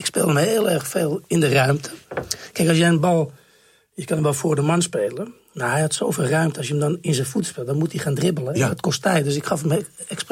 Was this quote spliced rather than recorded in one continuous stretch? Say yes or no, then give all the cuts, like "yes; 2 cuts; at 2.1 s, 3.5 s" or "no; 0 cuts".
no; 0 cuts